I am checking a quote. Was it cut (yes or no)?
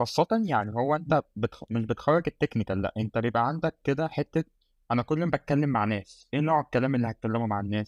no